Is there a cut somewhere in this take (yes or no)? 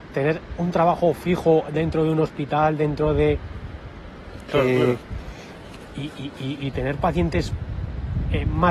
no